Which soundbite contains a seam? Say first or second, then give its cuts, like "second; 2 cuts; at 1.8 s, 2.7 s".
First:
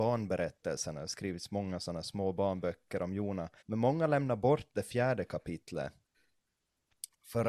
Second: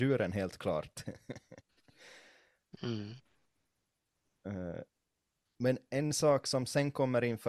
first; 1 cut; at 3.6 s